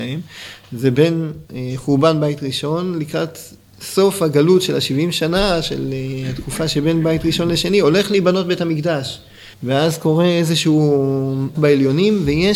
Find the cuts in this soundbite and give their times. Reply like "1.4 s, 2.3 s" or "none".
1.5 s, 9.5 s, 11.5 s